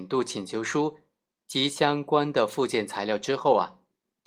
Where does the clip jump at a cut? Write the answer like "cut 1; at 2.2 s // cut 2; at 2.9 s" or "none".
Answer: none